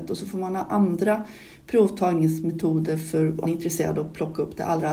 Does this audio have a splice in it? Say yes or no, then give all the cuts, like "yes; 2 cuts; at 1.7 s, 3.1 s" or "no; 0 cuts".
yes; 1 cut; at 3.5 s